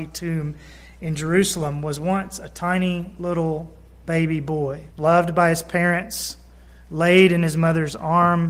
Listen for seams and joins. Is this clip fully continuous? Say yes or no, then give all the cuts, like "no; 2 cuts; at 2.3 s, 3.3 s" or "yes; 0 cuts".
no; 1 cut; at 4.9 s